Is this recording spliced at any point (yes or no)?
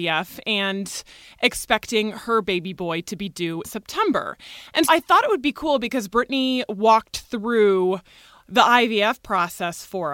yes